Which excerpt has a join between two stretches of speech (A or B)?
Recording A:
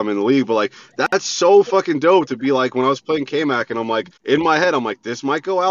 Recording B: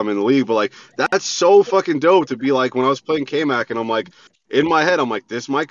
A